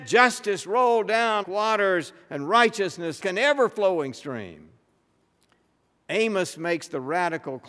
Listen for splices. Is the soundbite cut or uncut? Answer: cut